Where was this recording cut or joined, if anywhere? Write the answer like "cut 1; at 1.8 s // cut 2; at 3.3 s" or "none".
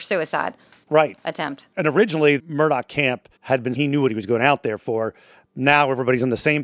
cut 1; at 2.4 s // cut 2; at 3.4 s // cut 3; at 3.7 s